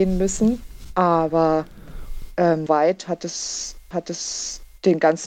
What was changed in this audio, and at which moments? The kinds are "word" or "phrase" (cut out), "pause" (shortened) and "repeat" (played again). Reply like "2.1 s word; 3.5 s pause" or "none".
2.7 s word; 3.9 s repeat